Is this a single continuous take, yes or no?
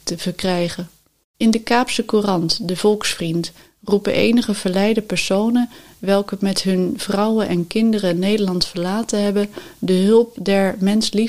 yes